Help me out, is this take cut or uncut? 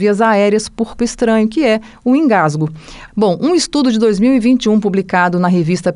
cut